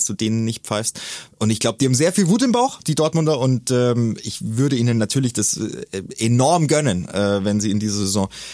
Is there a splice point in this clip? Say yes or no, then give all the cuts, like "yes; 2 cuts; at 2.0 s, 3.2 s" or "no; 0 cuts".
no; 0 cuts